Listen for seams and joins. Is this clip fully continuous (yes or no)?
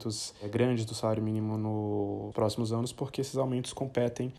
no